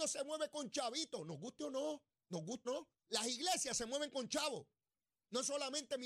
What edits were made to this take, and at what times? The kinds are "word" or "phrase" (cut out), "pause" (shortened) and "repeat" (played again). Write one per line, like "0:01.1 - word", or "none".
0:02.6 - word
0:03.0 - pause